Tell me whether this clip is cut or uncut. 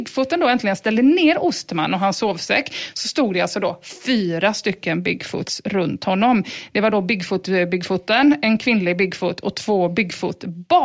uncut